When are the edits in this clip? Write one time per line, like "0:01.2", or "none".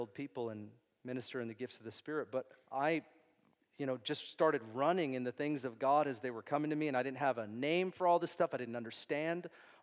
none